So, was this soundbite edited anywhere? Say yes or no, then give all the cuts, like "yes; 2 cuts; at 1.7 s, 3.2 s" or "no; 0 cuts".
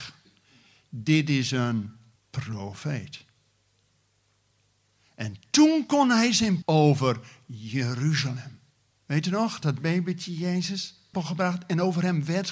yes; 5 cuts; at 2.2 s, 6.6 s, 8.9 s, 9.6 s, 11.1 s